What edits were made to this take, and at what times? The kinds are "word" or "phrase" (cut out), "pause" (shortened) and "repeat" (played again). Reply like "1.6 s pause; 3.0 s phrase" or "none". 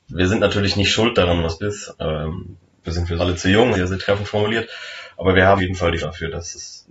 1.6 s word; 2.8 s word; 3.2 s word; 3.7 s word; 5.6 s word; 6.0 s word